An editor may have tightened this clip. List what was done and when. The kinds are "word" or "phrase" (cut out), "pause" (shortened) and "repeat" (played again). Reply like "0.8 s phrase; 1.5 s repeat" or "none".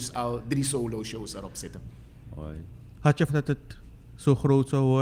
3.3 s word